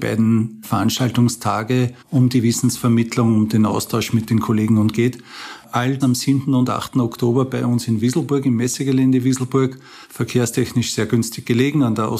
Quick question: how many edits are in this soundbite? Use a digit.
3